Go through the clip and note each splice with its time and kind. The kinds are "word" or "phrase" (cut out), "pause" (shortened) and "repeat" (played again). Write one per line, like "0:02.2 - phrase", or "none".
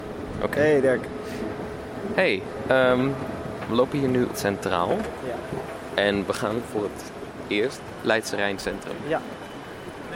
0:04.3 - phrase